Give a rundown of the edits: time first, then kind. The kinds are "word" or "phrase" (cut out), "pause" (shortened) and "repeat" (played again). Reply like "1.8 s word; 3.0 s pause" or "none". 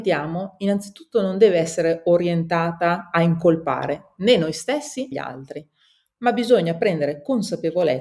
5.1 s word